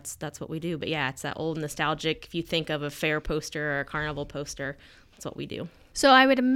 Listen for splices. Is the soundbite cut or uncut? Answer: uncut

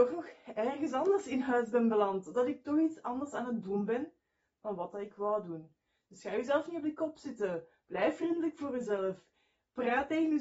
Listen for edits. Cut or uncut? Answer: uncut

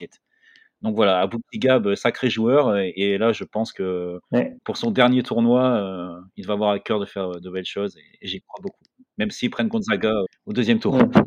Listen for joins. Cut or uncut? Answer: cut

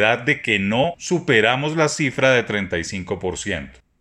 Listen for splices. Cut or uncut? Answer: uncut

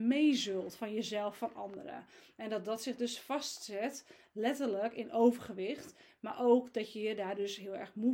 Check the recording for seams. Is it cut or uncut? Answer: uncut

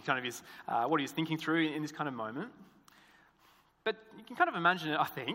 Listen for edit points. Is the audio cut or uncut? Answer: uncut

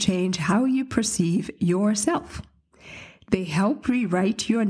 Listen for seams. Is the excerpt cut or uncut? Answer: uncut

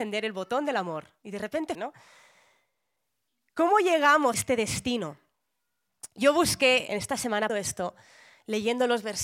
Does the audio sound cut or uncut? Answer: cut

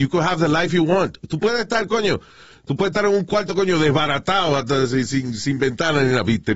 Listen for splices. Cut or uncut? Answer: uncut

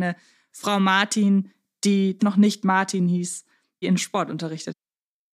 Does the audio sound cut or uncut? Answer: cut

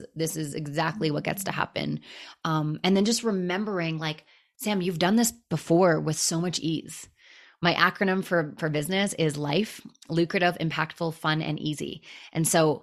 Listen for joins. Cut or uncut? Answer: uncut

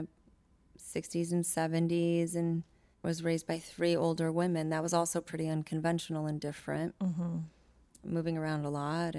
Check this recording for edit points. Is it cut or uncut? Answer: uncut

